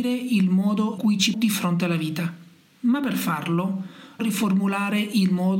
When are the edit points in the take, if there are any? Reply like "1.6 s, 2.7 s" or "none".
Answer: 1.0 s, 1.3 s, 4.2 s